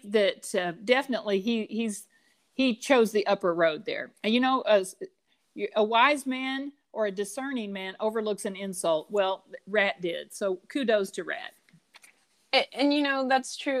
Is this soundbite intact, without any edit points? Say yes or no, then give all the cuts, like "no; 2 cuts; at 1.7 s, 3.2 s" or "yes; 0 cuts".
yes; 0 cuts